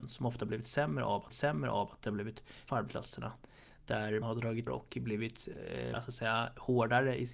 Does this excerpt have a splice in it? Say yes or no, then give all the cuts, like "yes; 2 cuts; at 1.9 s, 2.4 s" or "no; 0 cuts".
yes; 5 cuts; at 1.3 s, 2.7 s, 4.2 s, 4.7 s, 5.9 s